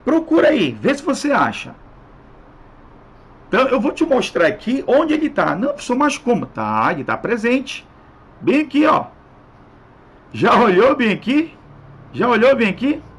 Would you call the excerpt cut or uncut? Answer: uncut